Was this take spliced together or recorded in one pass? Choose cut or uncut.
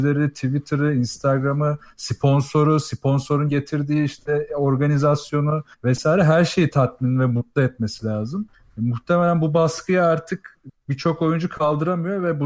cut